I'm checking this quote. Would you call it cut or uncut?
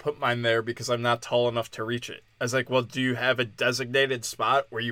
uncut